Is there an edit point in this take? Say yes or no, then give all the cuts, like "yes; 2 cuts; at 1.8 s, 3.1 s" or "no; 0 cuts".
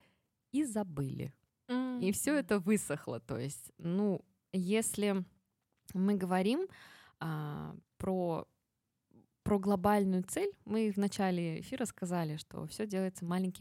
no; 0 cuts